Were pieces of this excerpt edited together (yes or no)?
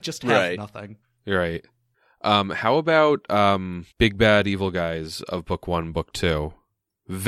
yes